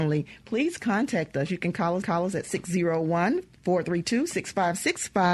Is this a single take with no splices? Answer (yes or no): no